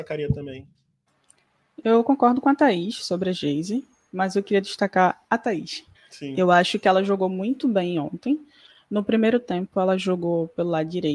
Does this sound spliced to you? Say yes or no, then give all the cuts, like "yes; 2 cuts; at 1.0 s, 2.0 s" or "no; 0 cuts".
yes; 1 cut; at 5.9 s